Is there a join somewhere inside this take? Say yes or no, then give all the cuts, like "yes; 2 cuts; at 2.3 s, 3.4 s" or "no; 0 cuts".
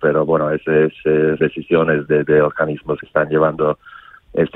yes; 3 cuts; at 1.4 s, 2.1 s, 3.0 s